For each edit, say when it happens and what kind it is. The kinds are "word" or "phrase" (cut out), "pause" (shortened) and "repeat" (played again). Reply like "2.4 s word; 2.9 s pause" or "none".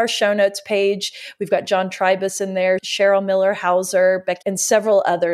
1.7 s word; 4.4 s word